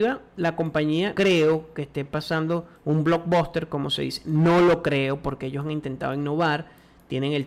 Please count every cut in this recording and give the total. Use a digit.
2